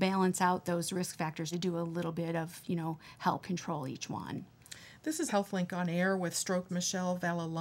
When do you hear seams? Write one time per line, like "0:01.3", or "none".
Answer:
0:01.5
0:03.4
0:05.3
0:06.7